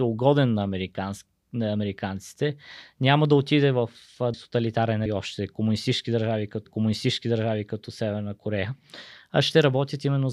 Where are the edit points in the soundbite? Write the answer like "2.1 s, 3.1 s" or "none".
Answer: 4.3 s, 5.1 s, 6.7 s